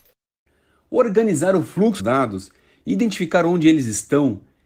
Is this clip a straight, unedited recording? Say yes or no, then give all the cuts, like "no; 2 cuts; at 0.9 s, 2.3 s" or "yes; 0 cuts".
no; 1 cut; at 2.0 s